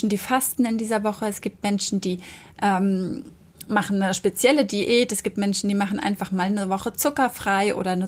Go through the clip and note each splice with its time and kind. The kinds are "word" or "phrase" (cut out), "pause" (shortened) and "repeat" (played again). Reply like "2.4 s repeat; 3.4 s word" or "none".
none